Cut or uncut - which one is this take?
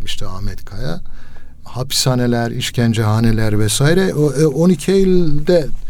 uncut